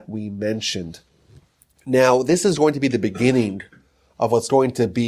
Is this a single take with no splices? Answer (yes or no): yes